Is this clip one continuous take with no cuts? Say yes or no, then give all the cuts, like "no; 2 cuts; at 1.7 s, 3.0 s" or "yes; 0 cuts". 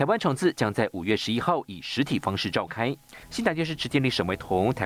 no; 1 cut; at 3.2 s